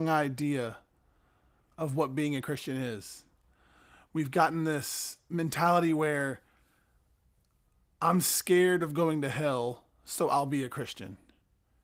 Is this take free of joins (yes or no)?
yes